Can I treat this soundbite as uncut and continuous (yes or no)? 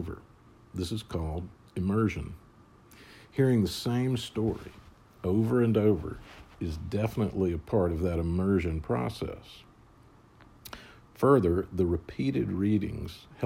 yes